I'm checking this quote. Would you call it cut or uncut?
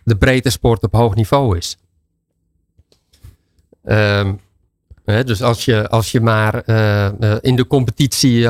uncut